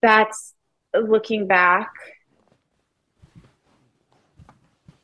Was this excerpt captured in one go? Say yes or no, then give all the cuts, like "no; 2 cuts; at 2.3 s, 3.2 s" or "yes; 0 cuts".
yes; 0 cuts